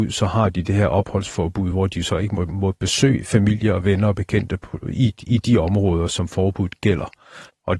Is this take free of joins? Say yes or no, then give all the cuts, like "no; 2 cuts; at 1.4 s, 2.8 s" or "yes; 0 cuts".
yes; 0 cuts